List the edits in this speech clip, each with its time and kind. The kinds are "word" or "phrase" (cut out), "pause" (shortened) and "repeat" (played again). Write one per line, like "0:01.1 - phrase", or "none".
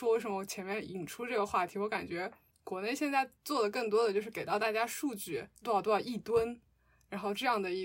0:02.5 - pause
0:03.4 - pause
0:05.5 - pause